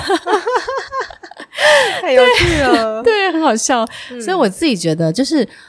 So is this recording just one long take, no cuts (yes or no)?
yes